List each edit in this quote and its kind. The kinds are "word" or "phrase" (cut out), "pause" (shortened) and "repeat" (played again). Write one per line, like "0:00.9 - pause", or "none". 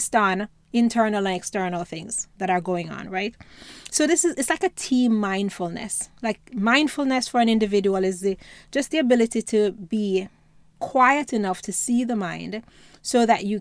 none